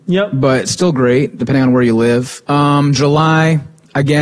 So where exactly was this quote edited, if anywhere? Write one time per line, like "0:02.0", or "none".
0:02.4